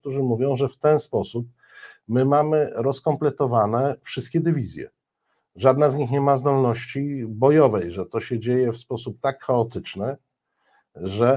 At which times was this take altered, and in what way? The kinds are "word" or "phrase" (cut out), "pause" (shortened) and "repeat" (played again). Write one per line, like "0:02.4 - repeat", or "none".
none